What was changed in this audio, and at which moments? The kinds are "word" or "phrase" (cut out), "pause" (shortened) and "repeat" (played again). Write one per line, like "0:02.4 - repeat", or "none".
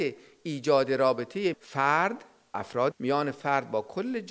0:01.5 - word
0:02.5 - word
0:02.9 - word